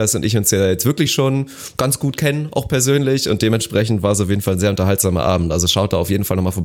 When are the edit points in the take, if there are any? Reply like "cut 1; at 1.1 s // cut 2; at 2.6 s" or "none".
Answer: none